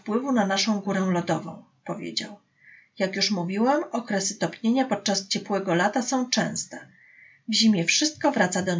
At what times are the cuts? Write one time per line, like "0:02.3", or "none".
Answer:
none